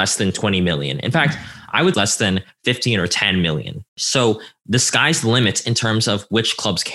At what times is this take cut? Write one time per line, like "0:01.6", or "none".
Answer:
0:01.9
0:03.9